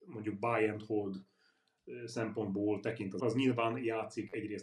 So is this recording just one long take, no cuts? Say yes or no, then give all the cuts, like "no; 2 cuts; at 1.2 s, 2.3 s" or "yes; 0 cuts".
no; 1 cut; at 3.2 s